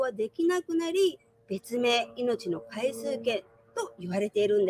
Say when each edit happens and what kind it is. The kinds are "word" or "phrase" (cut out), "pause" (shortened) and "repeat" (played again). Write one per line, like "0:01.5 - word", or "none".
none